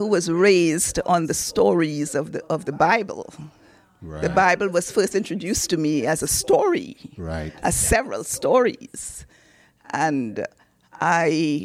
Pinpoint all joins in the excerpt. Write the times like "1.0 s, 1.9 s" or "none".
none